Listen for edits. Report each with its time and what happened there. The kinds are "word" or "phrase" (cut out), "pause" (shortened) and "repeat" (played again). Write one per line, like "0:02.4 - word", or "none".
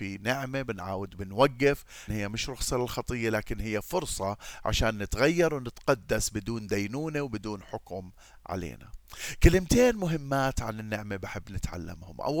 0:02.1 - word